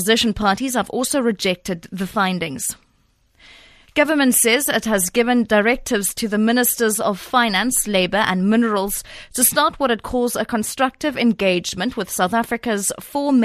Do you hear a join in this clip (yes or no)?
no